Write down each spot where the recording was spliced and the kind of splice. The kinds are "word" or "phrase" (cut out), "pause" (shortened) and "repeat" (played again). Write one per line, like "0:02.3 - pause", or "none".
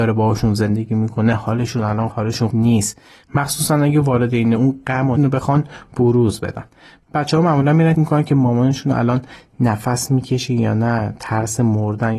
0:02.1 - word
0:02.5 - word
0:04.6 - word
0:05.2 - word
0:07.9 - word